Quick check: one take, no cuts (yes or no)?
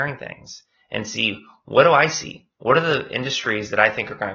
yes